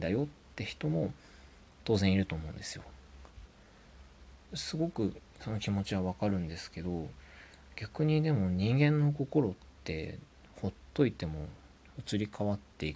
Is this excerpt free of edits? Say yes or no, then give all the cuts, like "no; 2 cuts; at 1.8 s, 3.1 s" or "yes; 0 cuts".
yes; 0 cuts